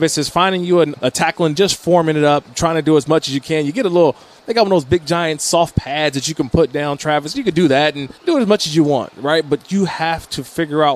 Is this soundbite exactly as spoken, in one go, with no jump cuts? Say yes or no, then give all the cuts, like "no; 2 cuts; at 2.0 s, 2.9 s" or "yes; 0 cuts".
no; 3 cuts; at 0.9 s, 1.6 s, 8.2 s